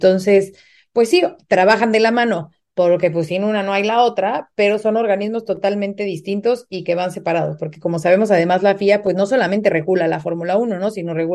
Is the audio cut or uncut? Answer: uncut